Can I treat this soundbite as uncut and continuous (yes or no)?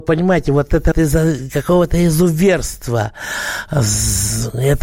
no